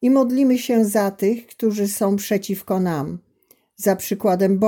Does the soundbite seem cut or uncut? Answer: uncut